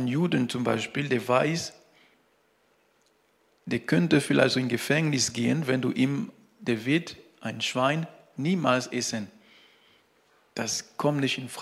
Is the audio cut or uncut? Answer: uncut